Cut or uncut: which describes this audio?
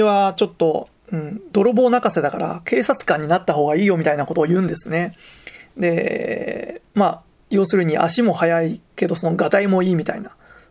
cut